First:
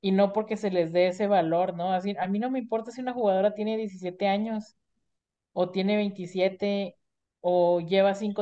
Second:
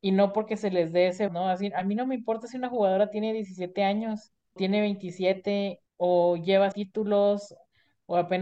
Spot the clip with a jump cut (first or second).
second